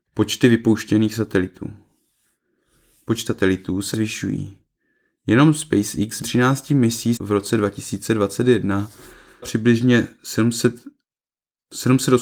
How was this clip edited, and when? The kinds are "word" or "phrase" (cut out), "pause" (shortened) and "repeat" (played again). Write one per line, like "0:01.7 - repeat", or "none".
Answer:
0:03.3 - word
0:03.9 - word
0:06.2 - word
0:07.2 - word
0:09.4 - word